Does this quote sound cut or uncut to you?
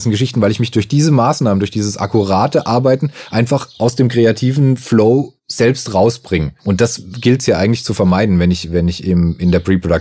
cut